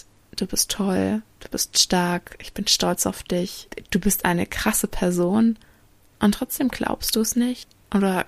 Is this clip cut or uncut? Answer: uncut